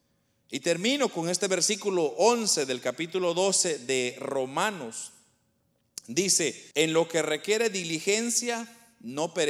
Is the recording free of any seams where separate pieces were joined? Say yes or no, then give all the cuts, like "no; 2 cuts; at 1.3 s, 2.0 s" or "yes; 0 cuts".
no; 1 cut; at 6.7 s